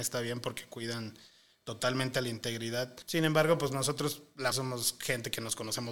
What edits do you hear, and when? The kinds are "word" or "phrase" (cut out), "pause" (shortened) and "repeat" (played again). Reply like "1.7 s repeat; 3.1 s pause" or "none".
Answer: 3.0 s pause; 4.5 s word

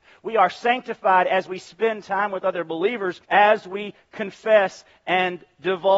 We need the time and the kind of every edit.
3.2 s pause

